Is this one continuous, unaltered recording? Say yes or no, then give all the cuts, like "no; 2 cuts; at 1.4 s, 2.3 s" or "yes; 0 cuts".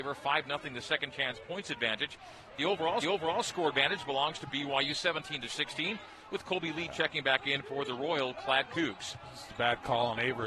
no; 1 cut; at 3.0 s